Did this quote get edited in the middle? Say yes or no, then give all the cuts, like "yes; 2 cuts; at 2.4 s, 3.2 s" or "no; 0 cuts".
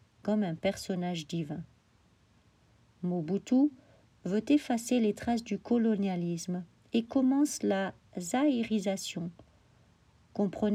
no; 0 cuts